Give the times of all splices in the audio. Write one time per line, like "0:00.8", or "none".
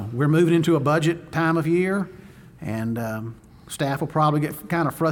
none